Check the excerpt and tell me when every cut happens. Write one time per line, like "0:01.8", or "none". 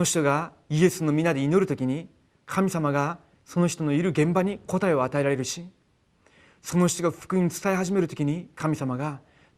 none